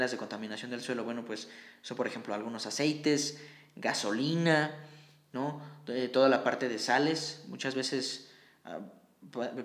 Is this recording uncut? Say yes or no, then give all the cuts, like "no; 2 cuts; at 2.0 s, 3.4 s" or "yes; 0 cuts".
yes; 0 cuts